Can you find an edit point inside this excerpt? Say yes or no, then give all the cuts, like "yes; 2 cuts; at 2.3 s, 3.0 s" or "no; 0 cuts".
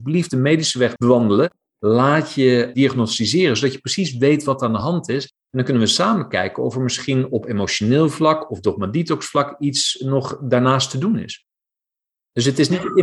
no; 0 cuts